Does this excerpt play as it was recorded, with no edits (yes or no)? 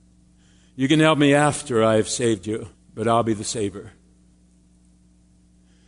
no